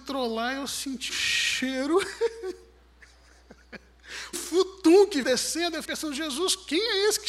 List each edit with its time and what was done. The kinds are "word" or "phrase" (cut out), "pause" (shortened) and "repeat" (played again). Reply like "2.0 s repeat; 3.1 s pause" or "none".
1.1 s word; 4.3 s word; 5.2 s word; 5.8 s word